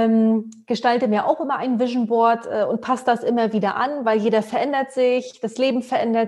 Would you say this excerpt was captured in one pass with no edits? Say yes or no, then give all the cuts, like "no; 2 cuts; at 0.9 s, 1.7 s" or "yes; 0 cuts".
yes; 0 cuts